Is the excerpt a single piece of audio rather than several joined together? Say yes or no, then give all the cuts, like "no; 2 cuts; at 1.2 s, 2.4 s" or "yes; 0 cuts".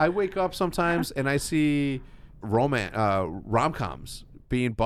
no; 1 cut; at 2.4 s